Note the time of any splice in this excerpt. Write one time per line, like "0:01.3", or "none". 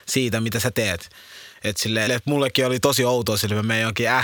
0:02.1